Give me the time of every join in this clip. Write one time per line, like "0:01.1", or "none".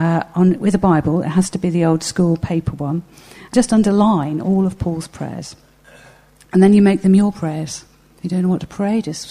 0:03.5